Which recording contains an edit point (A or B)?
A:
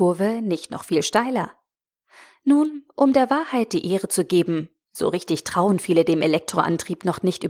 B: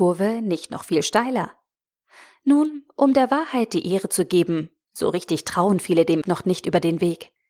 B